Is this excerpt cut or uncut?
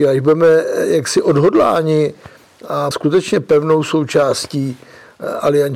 cut